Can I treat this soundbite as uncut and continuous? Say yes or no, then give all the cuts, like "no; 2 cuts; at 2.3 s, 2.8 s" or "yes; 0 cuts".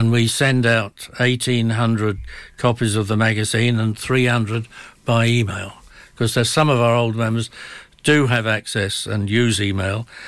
yes; 0 cuts